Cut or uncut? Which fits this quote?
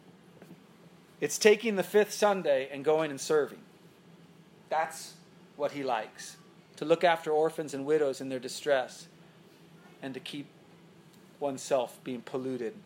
uncut